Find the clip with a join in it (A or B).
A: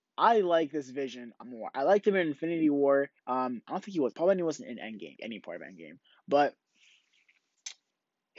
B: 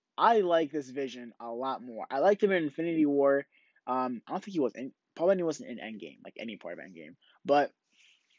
A